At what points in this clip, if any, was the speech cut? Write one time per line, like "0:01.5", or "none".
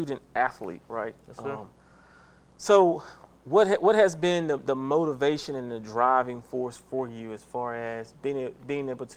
none